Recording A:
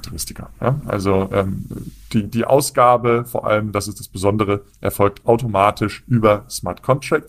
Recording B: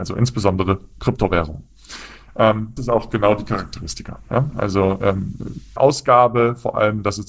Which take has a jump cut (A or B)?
B